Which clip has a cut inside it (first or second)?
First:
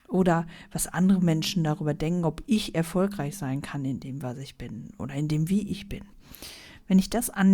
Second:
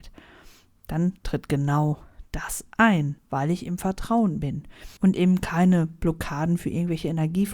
second